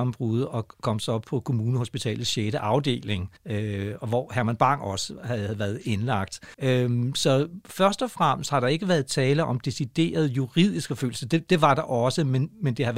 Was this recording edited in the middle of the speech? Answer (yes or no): yes